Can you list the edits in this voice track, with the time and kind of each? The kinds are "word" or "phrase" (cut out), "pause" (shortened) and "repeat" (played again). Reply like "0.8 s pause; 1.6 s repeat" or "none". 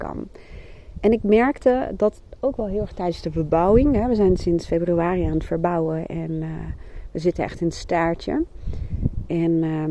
none